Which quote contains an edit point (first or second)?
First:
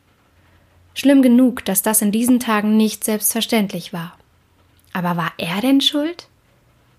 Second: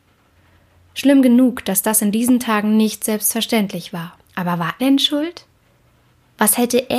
second